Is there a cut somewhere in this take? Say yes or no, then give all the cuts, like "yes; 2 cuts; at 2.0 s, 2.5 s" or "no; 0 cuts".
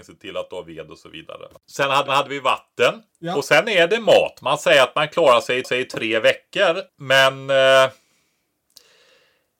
yes; 4 cuts; at 2.1 s, 3.1 s, 5.6 s, 6.9 s